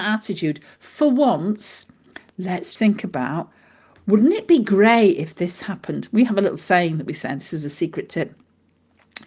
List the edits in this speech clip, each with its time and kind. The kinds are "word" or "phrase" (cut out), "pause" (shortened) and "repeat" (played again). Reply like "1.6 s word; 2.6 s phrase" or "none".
2.8 s word